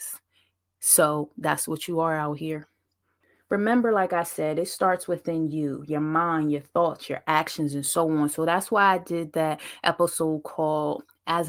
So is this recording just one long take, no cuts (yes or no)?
yes